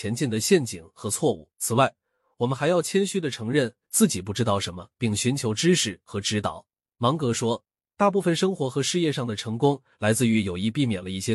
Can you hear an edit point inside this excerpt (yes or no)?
yes